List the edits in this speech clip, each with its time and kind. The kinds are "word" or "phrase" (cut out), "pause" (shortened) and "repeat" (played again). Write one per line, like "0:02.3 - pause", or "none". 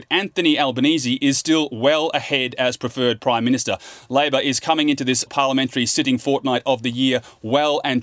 0:05.3 - word

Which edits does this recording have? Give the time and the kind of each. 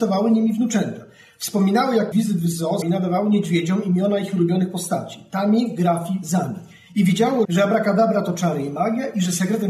0:02.1 - word
0:02.8 - word
0:07.4 - word

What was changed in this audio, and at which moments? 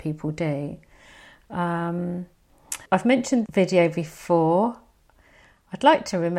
0:02.9 - word
0:03.5 - word

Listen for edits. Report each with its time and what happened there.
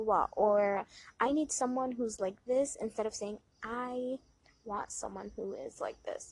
none

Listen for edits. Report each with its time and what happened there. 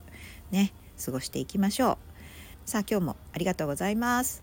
0:02.5 - pause

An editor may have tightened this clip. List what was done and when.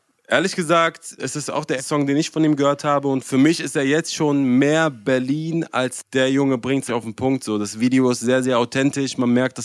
0:01.2 - word
0:01.8 - word
0:06.1 - pause
0:06.9 - phrase

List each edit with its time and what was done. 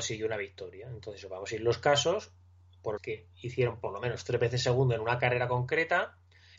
0:03.0 - phrase

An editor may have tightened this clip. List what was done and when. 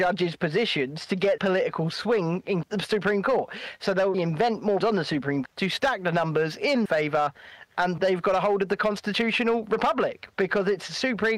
0:01.4 - word
0:02.6 - phrase
0:04.1 - word
0:04.8 - word
0:05.5 - word
0:06.9 - word
0:08.0 - word

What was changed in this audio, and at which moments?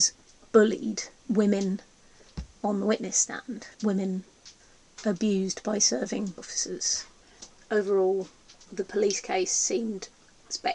0:01.2 - pause
0:03.7 - pause
0:06.4 - word

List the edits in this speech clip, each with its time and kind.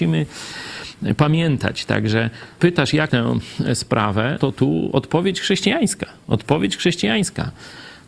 0:02.6 - word
0:03.1 - word
0:04.4 - word

